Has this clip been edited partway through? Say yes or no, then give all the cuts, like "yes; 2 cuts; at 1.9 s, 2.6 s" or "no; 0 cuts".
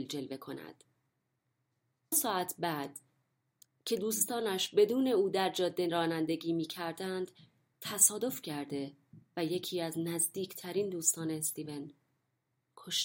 yes; 1 cut; at 2.1 s